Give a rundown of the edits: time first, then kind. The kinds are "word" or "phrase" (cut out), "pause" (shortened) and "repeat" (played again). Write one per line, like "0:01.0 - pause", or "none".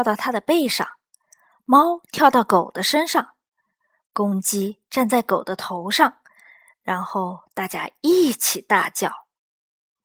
none